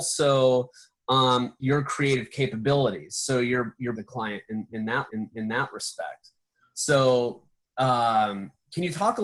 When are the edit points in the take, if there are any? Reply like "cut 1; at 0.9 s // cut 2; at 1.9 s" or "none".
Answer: cut 1; at 3.9 s // cut 2; at 5.1 s